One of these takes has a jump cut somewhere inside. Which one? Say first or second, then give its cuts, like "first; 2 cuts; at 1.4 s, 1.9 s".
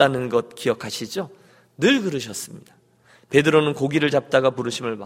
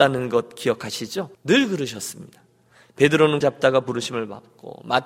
second; 2 cuts; at 1.3 s, 3.4 s